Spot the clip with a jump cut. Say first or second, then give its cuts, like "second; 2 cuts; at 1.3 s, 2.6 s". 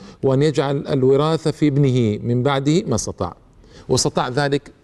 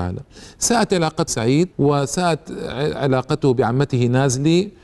second; 2 cuts; at 1.3 s, 1.7 s